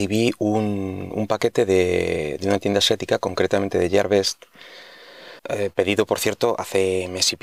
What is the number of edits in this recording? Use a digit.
1